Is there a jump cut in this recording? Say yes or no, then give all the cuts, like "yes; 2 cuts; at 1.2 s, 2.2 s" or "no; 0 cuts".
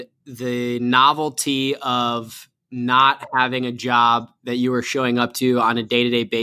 no; 0 cuts